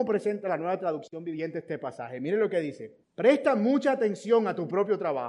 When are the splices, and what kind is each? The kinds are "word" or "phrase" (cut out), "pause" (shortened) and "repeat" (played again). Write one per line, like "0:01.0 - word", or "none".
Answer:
0:03.0 - pause